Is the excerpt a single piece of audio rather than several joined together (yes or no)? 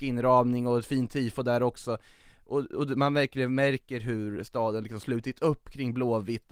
yes